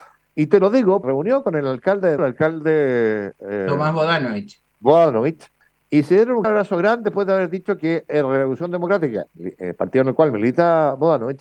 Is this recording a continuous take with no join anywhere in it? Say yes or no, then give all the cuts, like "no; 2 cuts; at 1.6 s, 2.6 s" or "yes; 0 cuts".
no; 4 cuts; at 1.0 s, 2.2 s, 5.6 s, 6.4 s